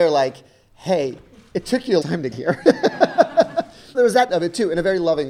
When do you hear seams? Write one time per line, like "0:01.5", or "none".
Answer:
0:02.0
0:02.3
0:03.9
0:04.3